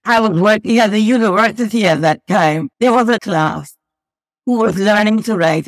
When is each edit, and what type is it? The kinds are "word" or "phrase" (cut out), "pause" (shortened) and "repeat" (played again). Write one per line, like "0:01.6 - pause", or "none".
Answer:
0:02.7 - pause
0:03.2 - phrase